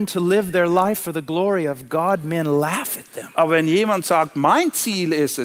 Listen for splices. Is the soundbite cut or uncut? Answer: uncut